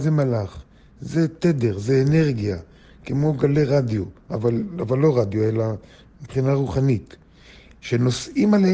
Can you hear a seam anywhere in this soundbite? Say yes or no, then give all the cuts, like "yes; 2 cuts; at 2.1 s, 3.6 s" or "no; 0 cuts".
no; 0 cuts